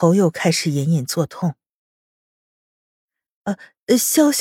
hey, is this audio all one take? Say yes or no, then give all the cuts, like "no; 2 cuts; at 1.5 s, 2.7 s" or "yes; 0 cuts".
yes; 0 cuts